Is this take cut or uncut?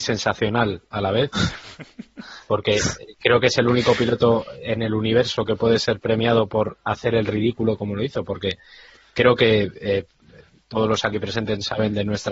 uncut